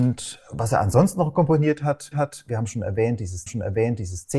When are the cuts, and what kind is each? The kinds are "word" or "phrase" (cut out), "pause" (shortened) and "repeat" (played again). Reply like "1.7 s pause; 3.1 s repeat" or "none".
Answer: 2.1 s repeat; 3.5 s repeat